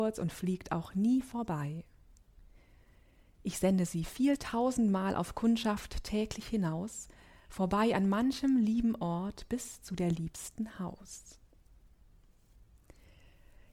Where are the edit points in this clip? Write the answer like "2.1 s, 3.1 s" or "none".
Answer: none